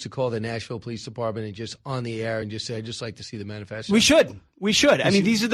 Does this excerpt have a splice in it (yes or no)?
no